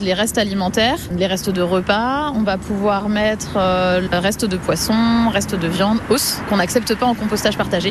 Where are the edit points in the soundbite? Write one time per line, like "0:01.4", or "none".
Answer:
none